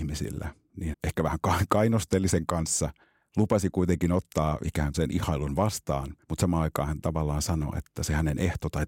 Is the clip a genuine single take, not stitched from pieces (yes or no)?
no